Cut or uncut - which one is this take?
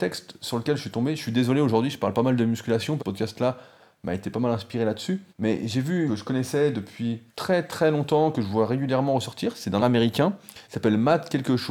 cut